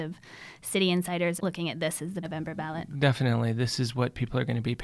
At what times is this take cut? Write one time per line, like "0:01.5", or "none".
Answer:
0:01.4
0:02.2

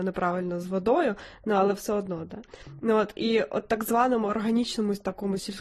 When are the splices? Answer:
none

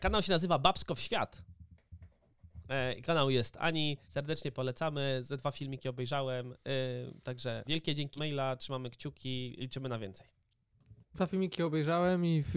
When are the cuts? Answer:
0:04.0
0:07.6
0:08.2
0:11.0

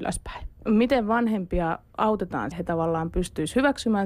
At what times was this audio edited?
0:02.5

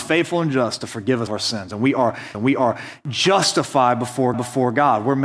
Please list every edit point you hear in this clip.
0:01.3
0:02.3
0:04.3

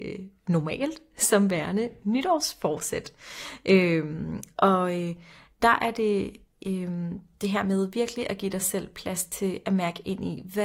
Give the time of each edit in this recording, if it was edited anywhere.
none

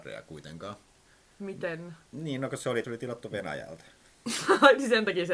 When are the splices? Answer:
0:02.8

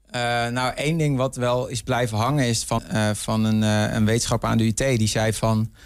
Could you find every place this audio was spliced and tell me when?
0:02.8

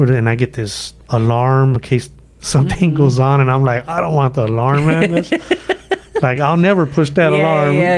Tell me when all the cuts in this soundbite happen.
none

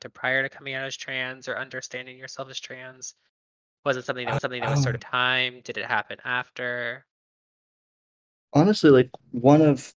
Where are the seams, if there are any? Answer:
0:04.4
0:05.0

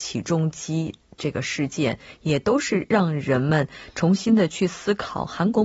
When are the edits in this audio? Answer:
none

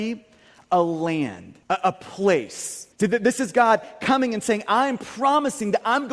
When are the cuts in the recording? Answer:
0:01.6
0:02.9

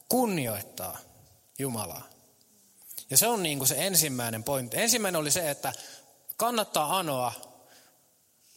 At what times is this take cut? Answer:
none

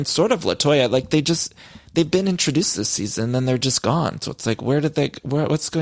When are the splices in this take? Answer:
none

